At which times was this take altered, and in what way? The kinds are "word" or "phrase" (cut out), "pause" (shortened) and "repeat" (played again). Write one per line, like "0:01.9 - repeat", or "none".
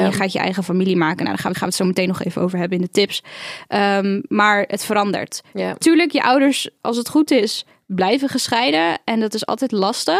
0:01.5 - repeat